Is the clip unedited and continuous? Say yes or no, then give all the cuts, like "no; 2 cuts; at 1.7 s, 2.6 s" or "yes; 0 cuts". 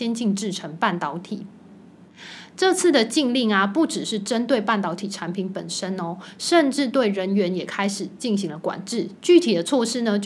no; 1 cut; at 9.2 s